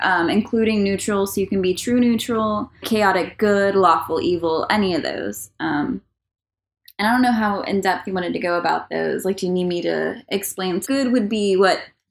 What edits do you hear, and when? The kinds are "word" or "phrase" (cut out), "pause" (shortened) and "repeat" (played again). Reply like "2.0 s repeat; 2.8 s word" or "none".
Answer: 2.8 s word; 10.8 s word